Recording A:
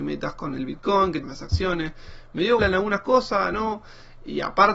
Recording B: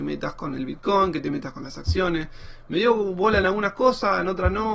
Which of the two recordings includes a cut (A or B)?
A